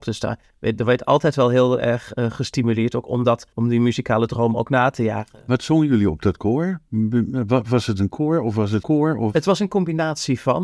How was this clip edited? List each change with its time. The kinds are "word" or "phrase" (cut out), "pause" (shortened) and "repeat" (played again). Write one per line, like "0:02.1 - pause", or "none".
0:03.5 - pause
0:08.1 - word
0:08.8 - word

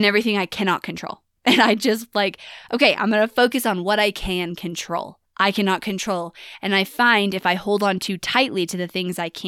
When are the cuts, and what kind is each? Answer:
0:05.3 - phrase

